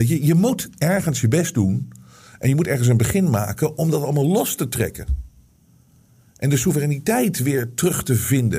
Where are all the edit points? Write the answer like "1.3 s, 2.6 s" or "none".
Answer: none